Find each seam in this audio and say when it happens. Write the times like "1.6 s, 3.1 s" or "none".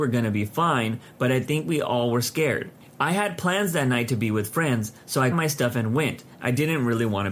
5.3 s